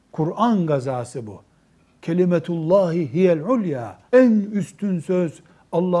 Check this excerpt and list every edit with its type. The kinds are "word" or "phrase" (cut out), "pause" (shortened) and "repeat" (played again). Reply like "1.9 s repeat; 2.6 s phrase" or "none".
4.1 s pause